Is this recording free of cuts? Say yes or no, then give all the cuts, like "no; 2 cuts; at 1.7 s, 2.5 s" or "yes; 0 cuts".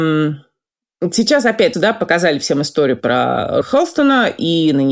no; 2 cuts; at 1.7 s, 3.6 s